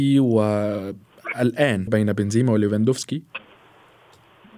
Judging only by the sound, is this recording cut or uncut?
cut